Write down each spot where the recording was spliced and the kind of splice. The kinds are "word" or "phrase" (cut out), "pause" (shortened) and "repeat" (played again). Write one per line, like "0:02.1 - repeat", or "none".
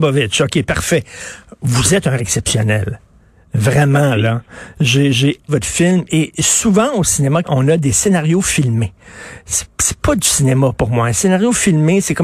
0:02.2 - word
0:05.5 - word
0:07.4 - word